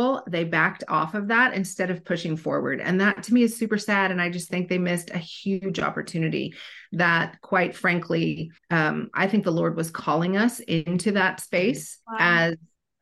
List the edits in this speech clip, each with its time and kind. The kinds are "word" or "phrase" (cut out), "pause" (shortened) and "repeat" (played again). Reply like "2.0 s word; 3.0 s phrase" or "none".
8.6 s pause; 12.0 s pause